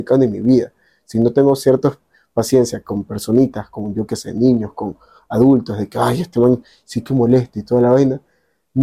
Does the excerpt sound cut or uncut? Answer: uncut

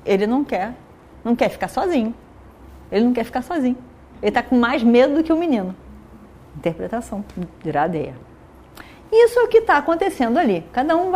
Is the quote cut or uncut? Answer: uncut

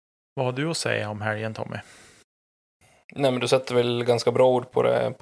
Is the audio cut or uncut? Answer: uncut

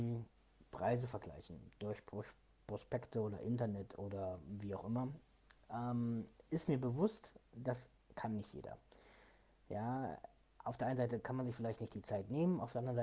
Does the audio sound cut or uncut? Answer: uncut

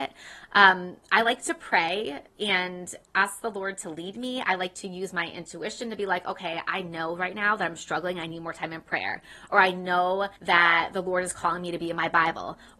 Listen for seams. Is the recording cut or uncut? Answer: cut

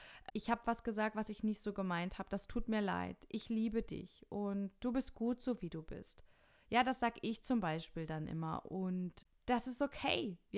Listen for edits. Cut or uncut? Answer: uncut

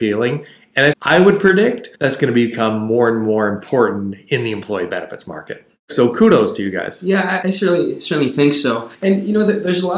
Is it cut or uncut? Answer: cut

